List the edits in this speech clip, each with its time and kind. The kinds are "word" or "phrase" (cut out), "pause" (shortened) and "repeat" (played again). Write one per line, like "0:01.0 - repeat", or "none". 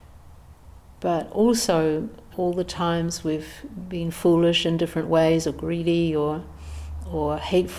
0:02.3 - word